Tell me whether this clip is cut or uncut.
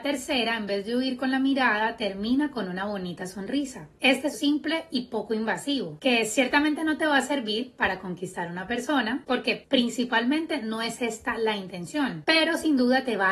cut